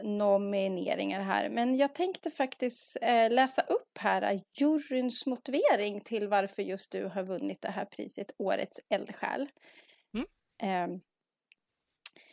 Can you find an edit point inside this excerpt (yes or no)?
no